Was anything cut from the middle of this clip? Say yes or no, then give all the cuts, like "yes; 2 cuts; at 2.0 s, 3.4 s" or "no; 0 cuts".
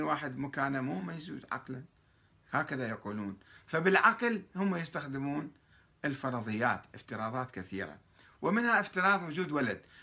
no; 0 cuts